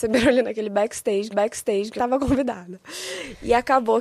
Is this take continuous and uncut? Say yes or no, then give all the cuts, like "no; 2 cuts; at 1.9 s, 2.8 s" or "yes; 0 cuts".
no; 2 cuts; at 1.3 s, 2.0 s